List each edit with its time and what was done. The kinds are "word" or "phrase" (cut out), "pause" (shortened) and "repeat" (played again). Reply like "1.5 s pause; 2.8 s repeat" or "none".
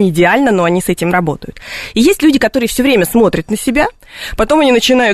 none